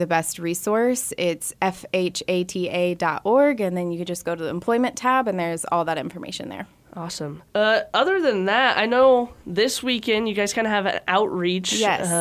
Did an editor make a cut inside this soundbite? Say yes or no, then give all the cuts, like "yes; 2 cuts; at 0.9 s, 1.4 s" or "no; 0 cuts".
yes; 1 cut; at 7.5 s